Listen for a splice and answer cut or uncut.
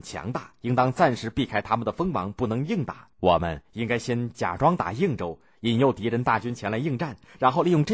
cut